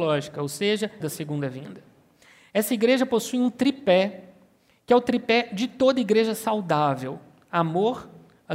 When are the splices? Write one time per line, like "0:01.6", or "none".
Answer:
0:01.0